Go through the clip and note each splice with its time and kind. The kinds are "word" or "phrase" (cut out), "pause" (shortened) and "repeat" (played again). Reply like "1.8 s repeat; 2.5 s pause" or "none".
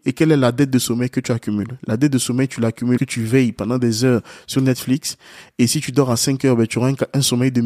3.0 s word